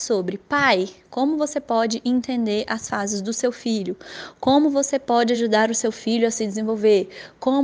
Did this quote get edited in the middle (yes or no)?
no